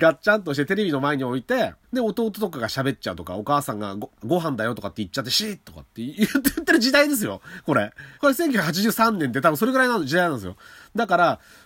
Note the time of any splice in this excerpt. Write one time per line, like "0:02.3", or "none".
0:01.8
0:04.2
0:08.2

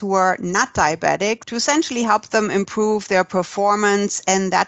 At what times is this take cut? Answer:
none

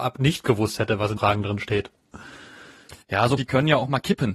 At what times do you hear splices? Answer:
0:01.2
0:03.0
0:03.4

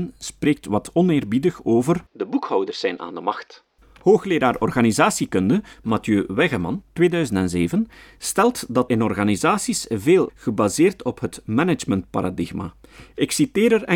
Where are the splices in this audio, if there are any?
0:03.8
0:08.9
0:10.3

